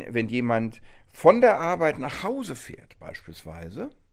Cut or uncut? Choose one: uncut